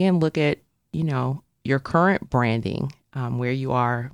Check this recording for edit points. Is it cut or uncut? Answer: uncut